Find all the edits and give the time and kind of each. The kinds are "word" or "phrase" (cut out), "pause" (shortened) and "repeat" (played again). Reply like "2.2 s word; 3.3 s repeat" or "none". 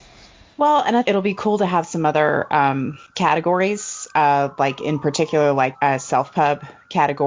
1.0 s word; 3.1 s pause; 5.7 s word